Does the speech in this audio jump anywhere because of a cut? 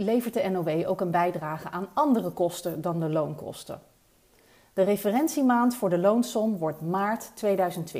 no; 0 cuts

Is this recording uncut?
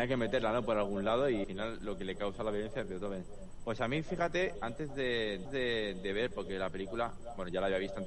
no; 3 cuts; at 1.4 s, 4.5 s, 5.4 s

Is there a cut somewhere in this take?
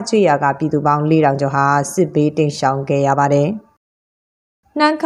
no; 0 cuts

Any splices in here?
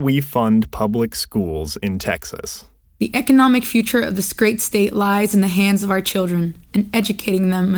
no; 0 cuts

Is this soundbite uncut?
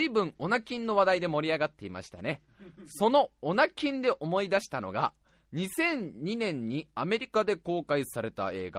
yes; 0 cuts

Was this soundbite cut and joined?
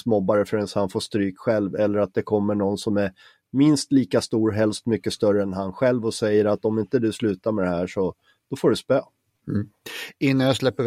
no; 0 cuts

